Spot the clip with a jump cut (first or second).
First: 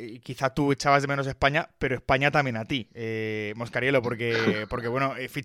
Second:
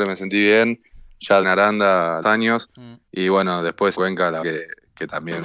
second